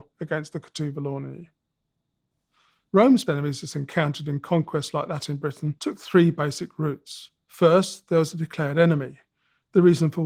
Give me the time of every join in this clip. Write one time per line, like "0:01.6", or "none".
0:03.3
0:05.8
0:07.4

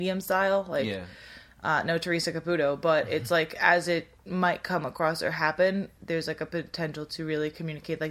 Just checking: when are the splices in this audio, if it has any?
0:04.2

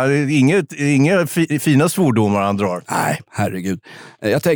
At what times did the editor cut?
none

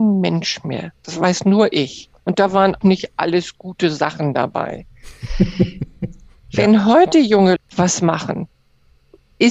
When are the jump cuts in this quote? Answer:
0:02.2
0:02.8
0:07.6

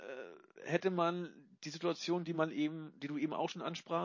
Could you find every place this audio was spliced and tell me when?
none

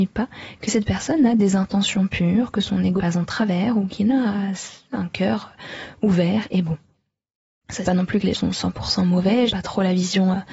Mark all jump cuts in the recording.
0:03.0
0:07.8
0:08.3
0:09.5

